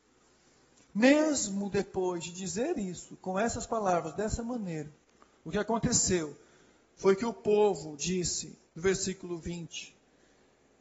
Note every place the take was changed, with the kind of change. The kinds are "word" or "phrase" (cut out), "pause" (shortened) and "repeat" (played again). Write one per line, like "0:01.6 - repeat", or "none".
0:05.1 - pause
0:08.7 - pause